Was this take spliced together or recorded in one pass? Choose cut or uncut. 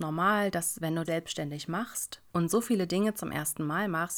cut